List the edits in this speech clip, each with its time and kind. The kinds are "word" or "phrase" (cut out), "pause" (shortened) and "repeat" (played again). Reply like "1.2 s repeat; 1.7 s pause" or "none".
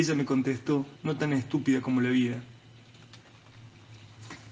0.9 s pause